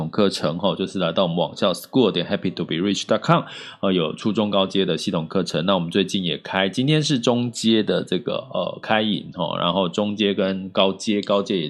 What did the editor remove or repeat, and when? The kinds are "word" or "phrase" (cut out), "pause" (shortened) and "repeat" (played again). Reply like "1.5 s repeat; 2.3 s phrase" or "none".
none

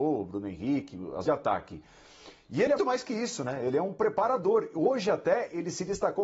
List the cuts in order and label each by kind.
1.2 s word; 2.8 s word

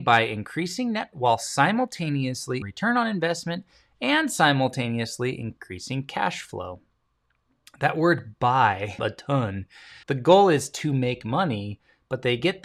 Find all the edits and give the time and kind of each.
1.1 s word; 2.6 s word; 9.0 s phrase; 10.0 s pause

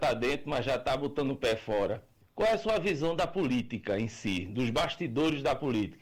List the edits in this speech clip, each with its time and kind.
2.2 s pause

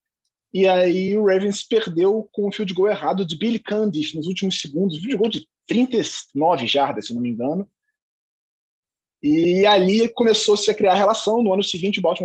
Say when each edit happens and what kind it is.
none

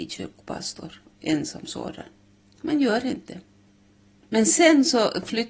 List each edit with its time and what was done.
none

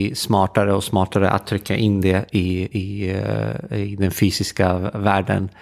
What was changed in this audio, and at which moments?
none

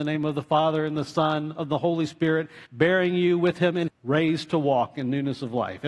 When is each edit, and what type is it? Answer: 2.6 s pause; 3.9 s phrase

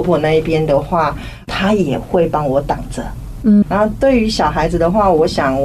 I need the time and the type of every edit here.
3.6 s word

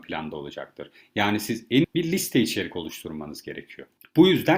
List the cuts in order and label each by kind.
1.8 s phrase

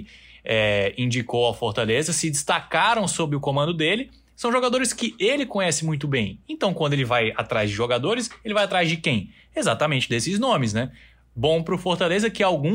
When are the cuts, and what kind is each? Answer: none

